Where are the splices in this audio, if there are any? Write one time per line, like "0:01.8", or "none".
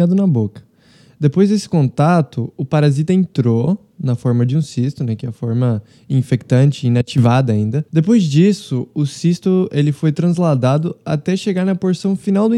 0:07.9